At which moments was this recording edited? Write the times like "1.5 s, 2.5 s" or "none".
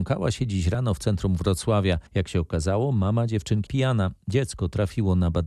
2.1 s, 3.7 s

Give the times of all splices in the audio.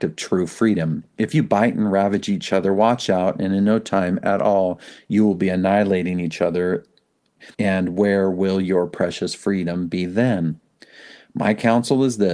7.5 s

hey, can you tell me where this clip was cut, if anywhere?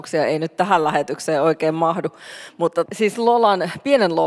2.9 s

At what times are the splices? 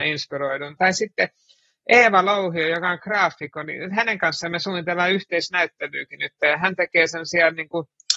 none

